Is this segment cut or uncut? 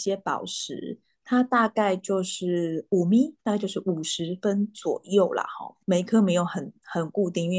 cut